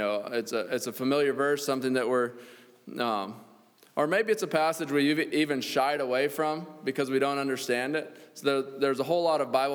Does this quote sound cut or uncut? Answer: uncut